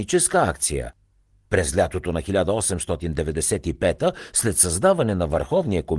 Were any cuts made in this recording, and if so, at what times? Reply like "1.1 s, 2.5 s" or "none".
none